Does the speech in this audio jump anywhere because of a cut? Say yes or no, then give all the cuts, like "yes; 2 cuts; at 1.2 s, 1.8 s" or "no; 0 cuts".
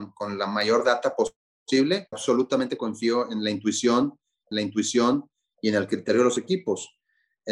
yes; 2 cuts; at 2.1 s, 4.5 s